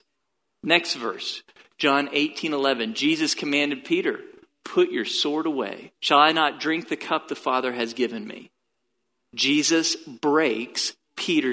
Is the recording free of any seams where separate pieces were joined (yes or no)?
no